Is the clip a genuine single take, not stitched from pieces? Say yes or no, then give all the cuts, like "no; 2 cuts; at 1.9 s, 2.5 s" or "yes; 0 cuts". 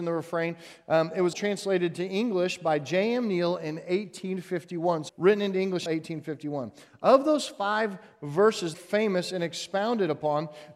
no; 4 cuts; at 1.3 s, 5.1 s, 5.9 s, 8.7 s